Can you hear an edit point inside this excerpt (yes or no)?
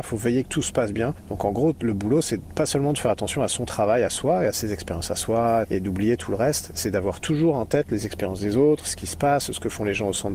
no